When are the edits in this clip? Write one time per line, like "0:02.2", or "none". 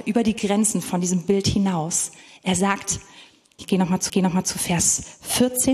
0:03.6
0:04.1